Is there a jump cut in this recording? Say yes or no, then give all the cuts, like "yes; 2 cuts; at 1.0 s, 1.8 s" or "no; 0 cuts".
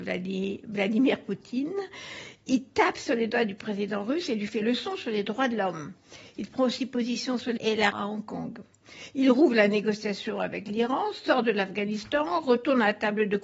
yes; 3 cuts; at 4.6 s, 7.6 s, 7.9 s